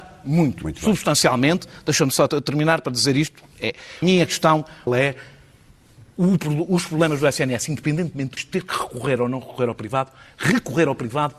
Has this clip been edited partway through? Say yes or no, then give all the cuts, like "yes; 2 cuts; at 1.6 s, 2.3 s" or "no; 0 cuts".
yes; 4 cuts; at 2.3 s, 4.0 s, 4.9 s, 8.4 s